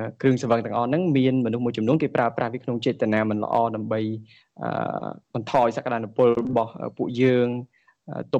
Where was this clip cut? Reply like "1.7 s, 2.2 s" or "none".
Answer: 5.2 s